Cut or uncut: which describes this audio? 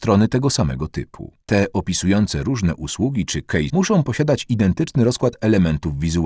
cut